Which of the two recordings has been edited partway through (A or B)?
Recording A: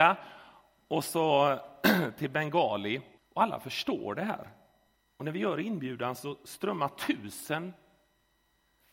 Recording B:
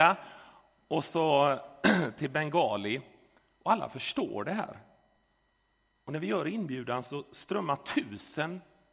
A